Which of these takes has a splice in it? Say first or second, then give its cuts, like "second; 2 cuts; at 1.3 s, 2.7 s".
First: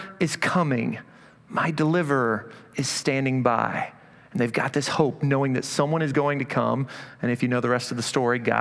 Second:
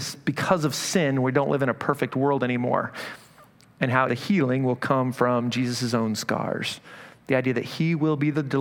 second; 1 cut; at 4.1 s